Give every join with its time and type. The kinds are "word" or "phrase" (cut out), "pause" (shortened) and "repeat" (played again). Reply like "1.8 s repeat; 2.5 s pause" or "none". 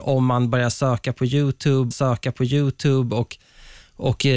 1.9 s repeat